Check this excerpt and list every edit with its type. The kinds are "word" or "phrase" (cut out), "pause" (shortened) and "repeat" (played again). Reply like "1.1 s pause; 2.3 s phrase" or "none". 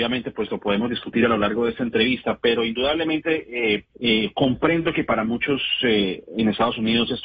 3.9 s pause